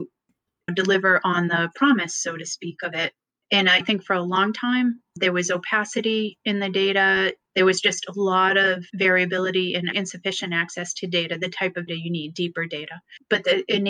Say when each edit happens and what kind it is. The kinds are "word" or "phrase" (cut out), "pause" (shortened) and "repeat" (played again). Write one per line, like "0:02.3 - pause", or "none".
0:11.9 - word